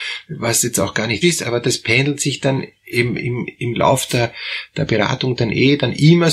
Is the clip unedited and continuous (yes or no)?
no